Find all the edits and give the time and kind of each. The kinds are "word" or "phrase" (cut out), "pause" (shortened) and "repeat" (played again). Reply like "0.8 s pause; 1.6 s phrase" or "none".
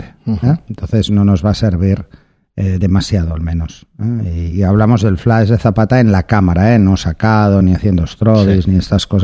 none